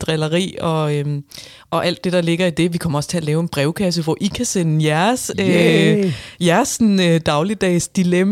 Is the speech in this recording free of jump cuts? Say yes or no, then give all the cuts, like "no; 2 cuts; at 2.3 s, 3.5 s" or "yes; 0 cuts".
yes; 0 cuts